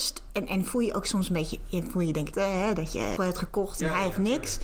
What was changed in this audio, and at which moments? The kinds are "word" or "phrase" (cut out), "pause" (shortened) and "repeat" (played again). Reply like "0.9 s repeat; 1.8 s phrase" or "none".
2.3 s phrase; 3.2 s word